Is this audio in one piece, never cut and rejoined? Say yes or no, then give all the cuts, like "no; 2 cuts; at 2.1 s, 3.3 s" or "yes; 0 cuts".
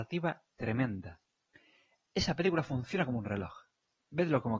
yes; 0 cuts